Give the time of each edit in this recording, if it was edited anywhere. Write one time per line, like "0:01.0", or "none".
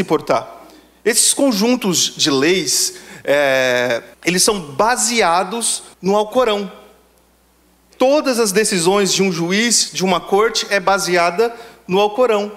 0:04.1
0:05.9